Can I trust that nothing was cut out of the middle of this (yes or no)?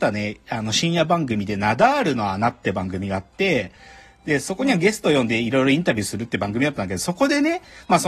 yes